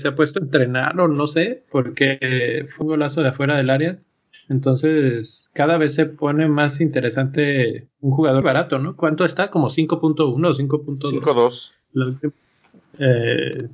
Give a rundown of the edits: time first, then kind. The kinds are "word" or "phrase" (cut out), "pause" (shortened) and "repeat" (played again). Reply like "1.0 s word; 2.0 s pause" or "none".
2.8 s phrase; 8.4 s word